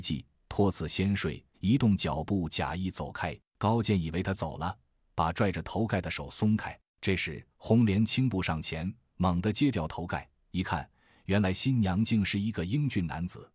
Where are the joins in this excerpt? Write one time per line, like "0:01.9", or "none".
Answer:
0:01.5
0:03.5
0:06.9
0:07.5